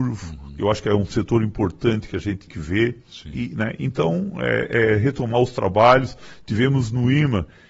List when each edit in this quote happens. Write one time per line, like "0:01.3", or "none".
0:02.5